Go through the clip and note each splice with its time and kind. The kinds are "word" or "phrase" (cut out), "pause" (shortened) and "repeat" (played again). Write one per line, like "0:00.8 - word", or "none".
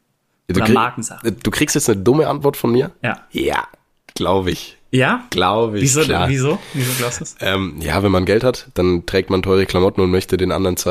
none